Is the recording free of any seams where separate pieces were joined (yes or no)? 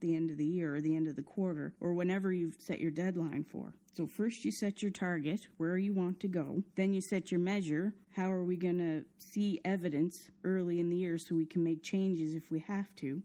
no